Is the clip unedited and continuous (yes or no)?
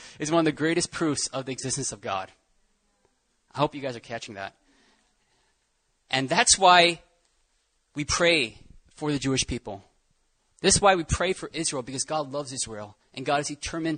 yes